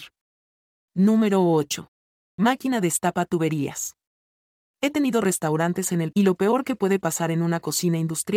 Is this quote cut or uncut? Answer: cut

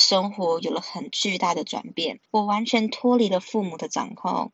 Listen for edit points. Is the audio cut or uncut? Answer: cut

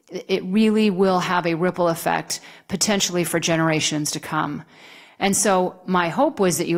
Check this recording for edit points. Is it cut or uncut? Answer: uncut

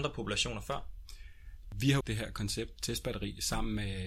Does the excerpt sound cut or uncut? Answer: cut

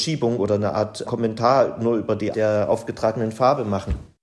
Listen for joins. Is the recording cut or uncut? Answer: cut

